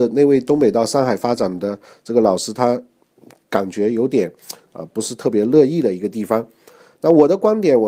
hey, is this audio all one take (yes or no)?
yes